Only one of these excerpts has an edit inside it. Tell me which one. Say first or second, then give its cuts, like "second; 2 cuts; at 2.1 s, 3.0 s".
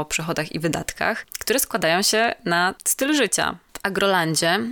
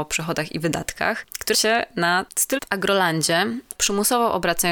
second; 3 cuts; at 1.5 s, 2.6 s, 3.7 s